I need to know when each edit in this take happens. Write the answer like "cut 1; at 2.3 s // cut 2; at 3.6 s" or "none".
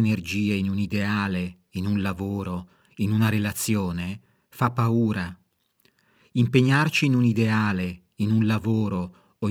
none